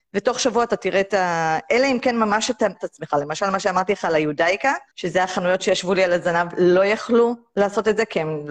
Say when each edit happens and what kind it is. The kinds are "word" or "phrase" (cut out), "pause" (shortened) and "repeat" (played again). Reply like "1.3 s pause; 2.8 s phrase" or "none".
2.7 s word; 4.9 s pause

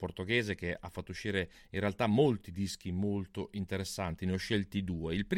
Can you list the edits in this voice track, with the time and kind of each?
none

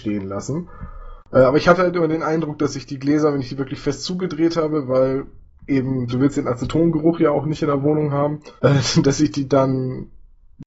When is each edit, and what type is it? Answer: 8.6 s pause

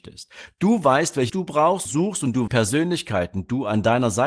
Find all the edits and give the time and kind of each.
1.3 s word; 1.9 s word; 2.5 s phrase

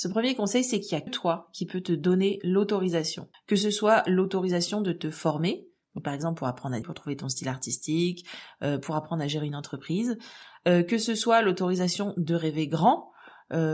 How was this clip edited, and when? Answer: 1.1 s word; 3.3 s pause; 6.8 s word

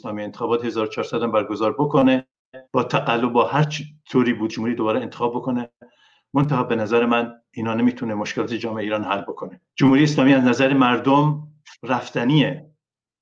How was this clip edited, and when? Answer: 2.7 s pause; 4.5 s phrase; 9.7 s pause

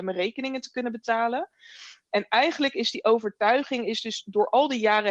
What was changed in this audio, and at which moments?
none

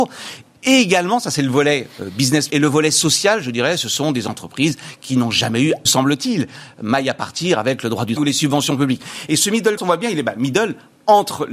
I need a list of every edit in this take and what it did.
2.5 s word; 5.9 s word; 8.2 s word; 9.8 s word

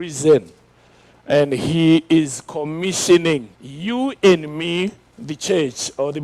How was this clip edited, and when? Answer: 3.5 s pause; 5.0 s pause

